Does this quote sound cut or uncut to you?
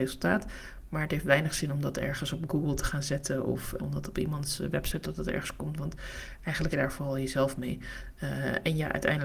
cut